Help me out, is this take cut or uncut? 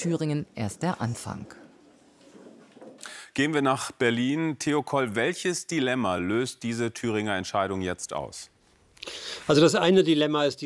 uncut